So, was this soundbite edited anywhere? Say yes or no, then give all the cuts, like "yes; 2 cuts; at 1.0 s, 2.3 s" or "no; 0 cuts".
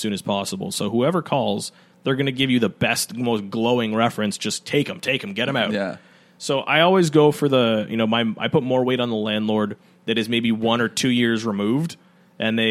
no; 0 cuts